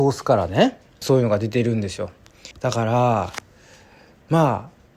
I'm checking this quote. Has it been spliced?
yes; 2 cuts; at 1.0 s, 2.5 s

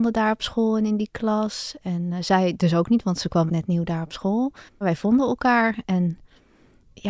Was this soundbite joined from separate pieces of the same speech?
yes; 2 cuts; at 3.5 s, 4.7 s

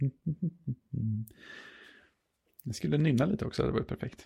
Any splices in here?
no; 0 cuts

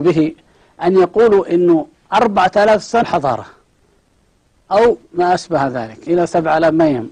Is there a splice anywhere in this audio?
yes; 4 cuts; at 1.9 s, 3.0 s, 5.0 s, 6.1 s

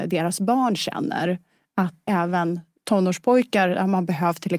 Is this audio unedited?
no; 1 cut; at 2.1 s

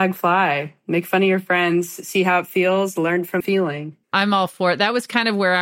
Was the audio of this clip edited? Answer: yes; 2 cuts; at 3.4 s, 4.0 s

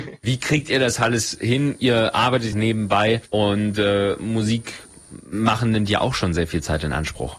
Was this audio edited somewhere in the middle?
yes; 1 cut; at 2.5 s

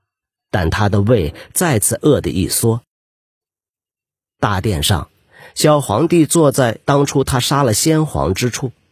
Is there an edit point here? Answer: no; 0 cuts

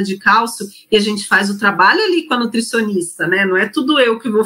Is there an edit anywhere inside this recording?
no; 0 cuts

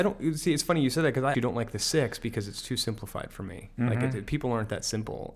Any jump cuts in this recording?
yes; 1 cut; at 1.3 s

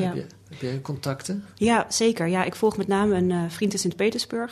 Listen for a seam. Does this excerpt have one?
no; 0 cuts

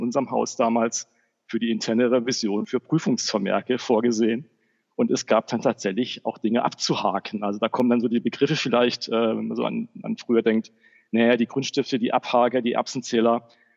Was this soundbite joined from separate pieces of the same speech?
no; 0 cuts

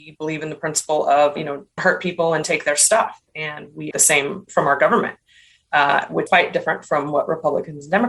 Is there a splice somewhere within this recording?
yes; 6 cuts; at 1.4 s, 1.8 s, 2.4 s, 3.9 s, 4.5 s, 6.3 s

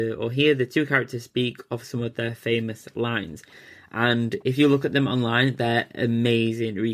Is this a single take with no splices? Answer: yes; 0 cuts

